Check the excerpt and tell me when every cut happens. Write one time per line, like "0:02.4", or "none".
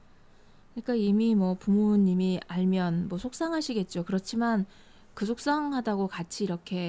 none